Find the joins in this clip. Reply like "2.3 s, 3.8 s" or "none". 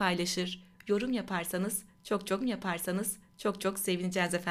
2.4 s